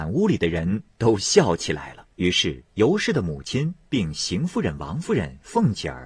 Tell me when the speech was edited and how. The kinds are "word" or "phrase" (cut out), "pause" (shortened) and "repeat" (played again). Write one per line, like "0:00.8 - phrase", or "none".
0:02.1 - pause